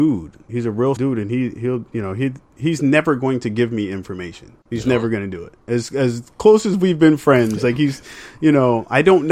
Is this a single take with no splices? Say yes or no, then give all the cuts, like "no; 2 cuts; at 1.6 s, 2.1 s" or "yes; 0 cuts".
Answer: no; 2 cuts; at 1.0 s, 4.6 s